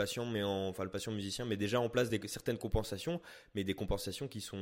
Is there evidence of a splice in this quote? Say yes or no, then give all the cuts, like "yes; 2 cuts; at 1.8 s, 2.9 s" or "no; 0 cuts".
no; 0 cuts